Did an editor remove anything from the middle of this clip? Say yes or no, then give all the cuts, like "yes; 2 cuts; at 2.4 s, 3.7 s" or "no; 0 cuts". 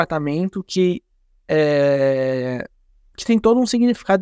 yes; 1 cut; at 2.9 s